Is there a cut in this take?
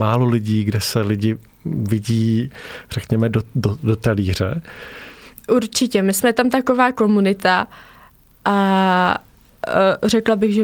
no; 0 cuts

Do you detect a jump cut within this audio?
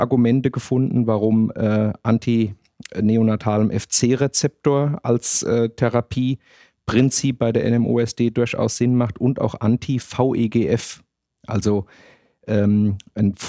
no; 0 cuts

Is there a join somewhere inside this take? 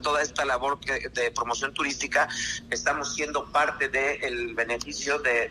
no; 0 cuts

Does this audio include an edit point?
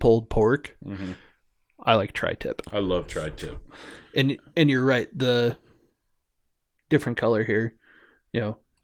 no; 0 cuts

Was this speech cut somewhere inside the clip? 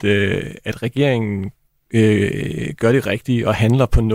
no; 0 cuts

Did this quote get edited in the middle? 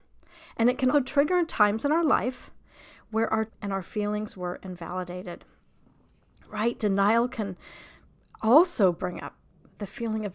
yes; 2 cuts; at 0.9 s, 3.5 s

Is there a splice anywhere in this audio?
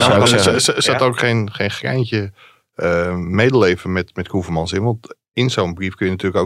no; 0 cuts

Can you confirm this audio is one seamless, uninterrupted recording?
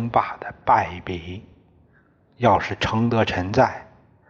yes; 0 cuts

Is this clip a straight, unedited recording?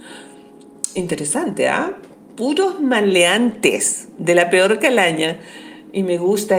yes; 0 cuts

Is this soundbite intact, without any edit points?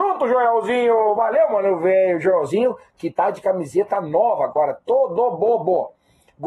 yes; 0 cuts

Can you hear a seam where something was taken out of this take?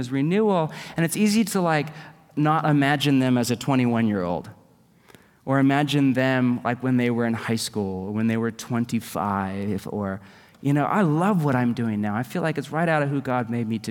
no; 0 cuts

